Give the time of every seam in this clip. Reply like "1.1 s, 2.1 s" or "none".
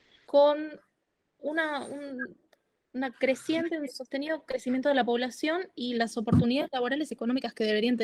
none